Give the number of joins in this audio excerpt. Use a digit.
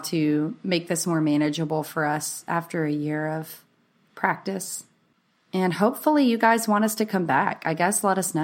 0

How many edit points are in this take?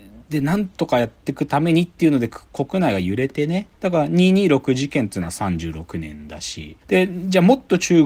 2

